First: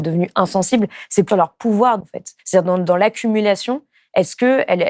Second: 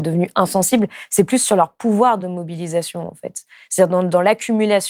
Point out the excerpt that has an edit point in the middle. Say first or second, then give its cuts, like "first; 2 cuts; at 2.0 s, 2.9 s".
first; 3 cuts; at 1.3 s, 2.0 s, 2.4 s